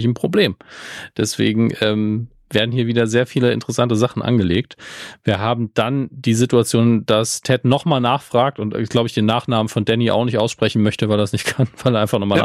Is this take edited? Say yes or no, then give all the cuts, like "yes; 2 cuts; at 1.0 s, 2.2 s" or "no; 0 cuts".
no; 0 cuts